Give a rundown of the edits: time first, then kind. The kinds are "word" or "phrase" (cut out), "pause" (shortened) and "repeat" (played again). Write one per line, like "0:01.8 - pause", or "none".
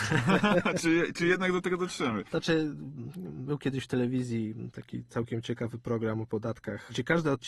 none